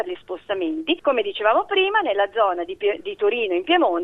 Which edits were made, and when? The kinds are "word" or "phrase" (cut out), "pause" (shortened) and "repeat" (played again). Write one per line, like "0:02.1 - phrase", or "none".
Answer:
none

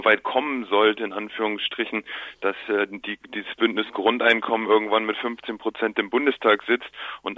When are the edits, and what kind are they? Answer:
none

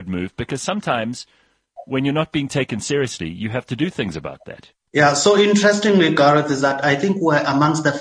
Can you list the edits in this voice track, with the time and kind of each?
0:04.8 - pause

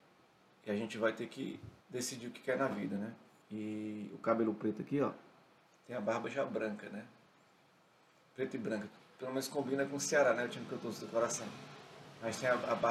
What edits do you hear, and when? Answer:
0:01.8 - pause
0:03.4 - pause
0:05.7 - pause

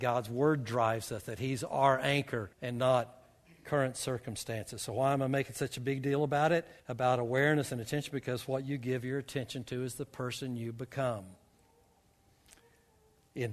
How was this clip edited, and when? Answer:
0:02.5 - pause
0:06.8 - pause

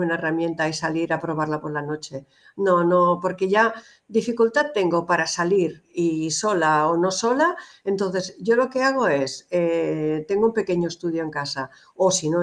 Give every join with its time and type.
none

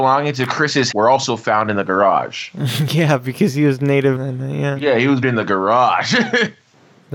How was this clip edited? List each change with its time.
0:00.9 - word
0:04.2 - word
0:05.2 - word

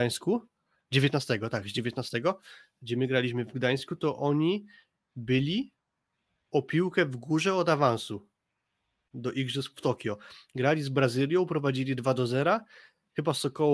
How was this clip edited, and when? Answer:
none

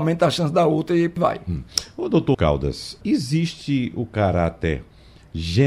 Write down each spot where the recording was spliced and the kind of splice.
0:01.2 - word
0:02.3 - word
0:03.0 - word

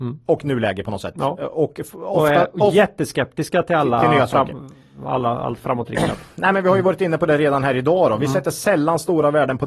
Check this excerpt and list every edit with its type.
none

